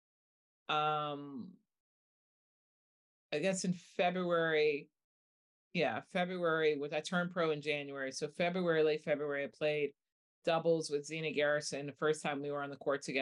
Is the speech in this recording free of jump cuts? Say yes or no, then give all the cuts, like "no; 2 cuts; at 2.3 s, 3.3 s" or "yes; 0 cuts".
yes; 0 cuts